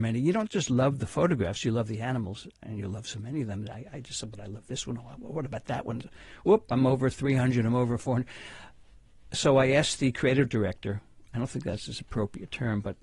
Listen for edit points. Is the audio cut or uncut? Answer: uncut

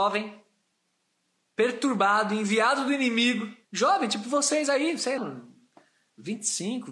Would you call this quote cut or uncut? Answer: cut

